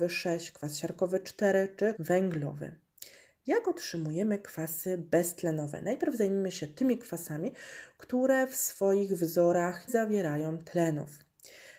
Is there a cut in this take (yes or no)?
yes